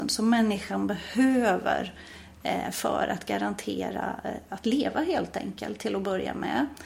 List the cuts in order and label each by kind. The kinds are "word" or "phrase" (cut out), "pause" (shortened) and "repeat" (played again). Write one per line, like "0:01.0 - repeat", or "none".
none